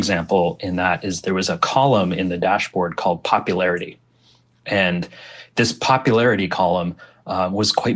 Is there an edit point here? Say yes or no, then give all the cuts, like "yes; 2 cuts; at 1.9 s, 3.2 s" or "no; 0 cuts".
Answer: no; 0 cuts